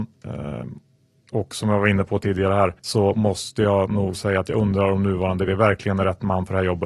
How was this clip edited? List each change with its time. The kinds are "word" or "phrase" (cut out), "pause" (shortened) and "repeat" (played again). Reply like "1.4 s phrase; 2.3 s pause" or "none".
2.8 s pause; 5.5 s word